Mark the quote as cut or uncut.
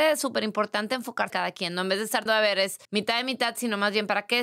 cut